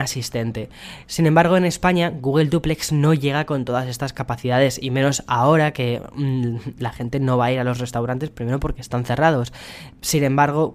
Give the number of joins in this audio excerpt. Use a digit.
0